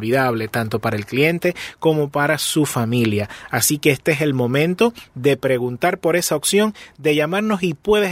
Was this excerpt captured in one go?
yes; 0 cuts

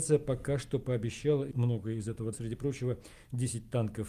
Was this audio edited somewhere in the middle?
yes; 2 cuts; at 1.5 s, 2.3 s

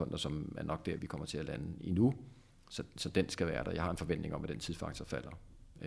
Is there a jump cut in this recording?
yes; 1 cut; at 1.0 s

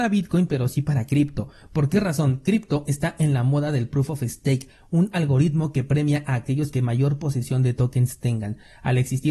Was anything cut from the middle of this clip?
no; 0 cuts

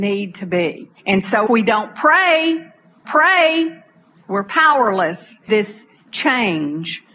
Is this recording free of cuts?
no; 4 cuts; at 1.0 s, 1.5 s, 3.0 s, 5.5 s

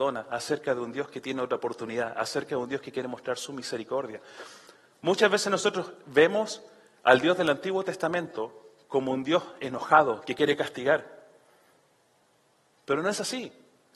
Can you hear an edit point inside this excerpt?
no; 0 cuts

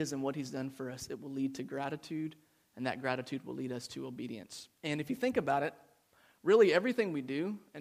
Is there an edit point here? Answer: yes; 1 cut; at 4.8 s

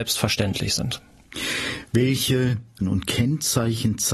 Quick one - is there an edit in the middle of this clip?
yes; 1 cut; at 2.8 s

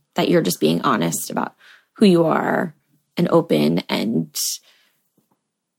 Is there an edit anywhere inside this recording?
no; 0 cuts

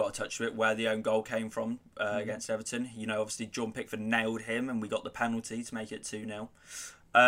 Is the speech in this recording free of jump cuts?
yes; 0 cuts

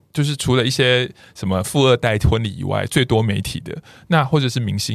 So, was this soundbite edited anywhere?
no; 0 cuts

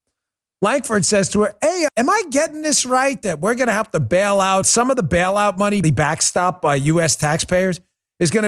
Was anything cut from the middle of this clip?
yes; 3 cuts; at 1.9 s, 4.6 s, 5.8 s

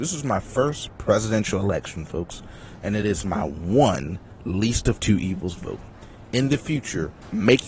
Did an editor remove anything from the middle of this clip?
no; 0 cuts

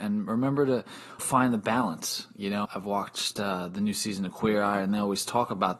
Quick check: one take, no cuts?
no; 2 cuts; at 1.2 s, 2.6 s

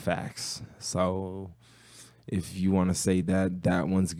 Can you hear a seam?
no; 0 cuts

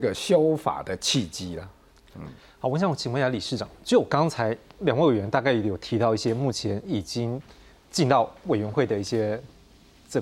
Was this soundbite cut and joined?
no; 0 cuts

